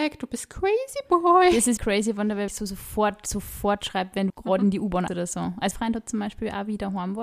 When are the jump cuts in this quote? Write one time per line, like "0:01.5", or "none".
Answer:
0:01.8
0:02.5
0:04.3
0:05.1
0:05.7